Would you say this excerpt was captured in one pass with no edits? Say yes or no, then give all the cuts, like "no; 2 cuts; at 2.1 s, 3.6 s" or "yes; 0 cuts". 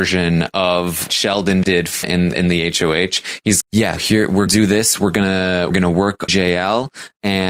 no; 9 cuts; at 1.1 s, 1.6 s, 2.0 s, 2.3 s, 3.6 s, 4.0 s, 4.5 s, 5.7 s, 6.3 s